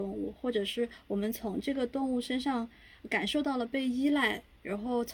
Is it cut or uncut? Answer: uncut